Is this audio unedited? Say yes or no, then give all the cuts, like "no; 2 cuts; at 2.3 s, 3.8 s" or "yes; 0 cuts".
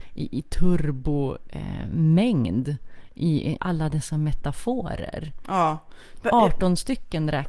no; 1 cut; at 3.6 s